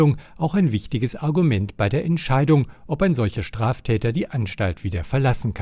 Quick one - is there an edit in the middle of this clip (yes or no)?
no